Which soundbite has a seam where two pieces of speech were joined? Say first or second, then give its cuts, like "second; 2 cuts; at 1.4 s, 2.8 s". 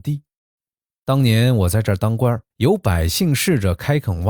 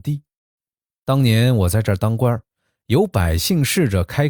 first; 1 cut; at 2.5 s